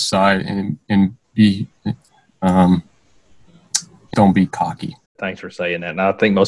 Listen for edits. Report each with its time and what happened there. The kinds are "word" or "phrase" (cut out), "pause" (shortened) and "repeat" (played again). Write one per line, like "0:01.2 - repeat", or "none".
0:01.2 - pause
0:04.1 - word
0:05.1 - pause